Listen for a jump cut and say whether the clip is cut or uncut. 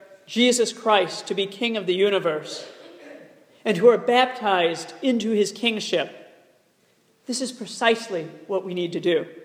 uncut